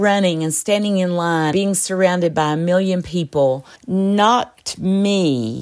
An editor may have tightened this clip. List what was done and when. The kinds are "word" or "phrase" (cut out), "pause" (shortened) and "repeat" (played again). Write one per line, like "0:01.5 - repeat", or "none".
0:01.5 - word
0:03.8 - pause

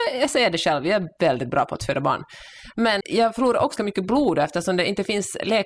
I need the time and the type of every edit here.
0:03.0 - word
0:03.8 - word

